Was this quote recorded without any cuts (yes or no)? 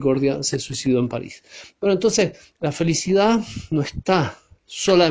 yes